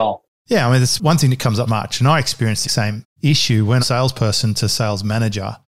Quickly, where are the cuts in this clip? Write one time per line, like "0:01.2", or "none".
0:01.7
0:02.6
0:03.8